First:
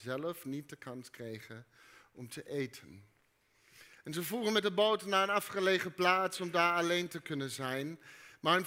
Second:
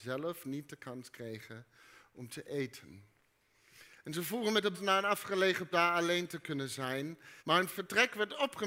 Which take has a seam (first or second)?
second